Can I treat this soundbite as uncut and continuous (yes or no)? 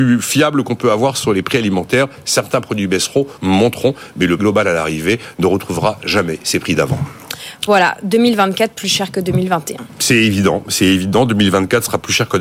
no